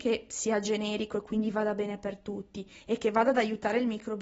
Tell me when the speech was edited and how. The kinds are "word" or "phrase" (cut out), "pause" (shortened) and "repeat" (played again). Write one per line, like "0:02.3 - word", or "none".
none